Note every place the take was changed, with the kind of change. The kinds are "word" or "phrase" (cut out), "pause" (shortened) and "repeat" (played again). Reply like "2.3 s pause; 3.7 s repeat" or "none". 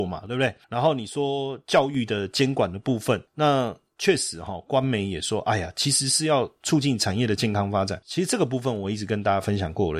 none